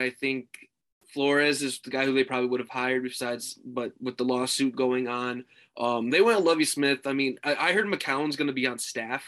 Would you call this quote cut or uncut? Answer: uncut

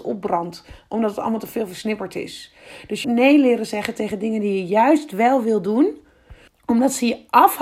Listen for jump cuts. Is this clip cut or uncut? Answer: cut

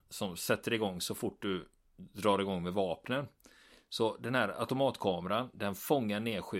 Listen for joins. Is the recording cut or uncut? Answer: uncut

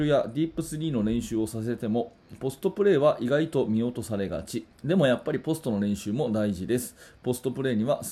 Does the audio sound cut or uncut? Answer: cut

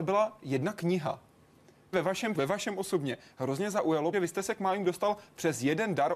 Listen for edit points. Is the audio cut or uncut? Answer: cut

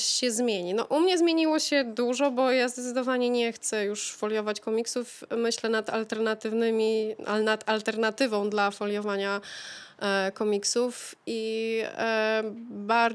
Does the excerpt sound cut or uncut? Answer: uncut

